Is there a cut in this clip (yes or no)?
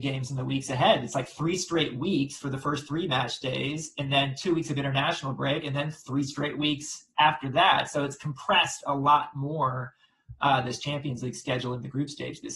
no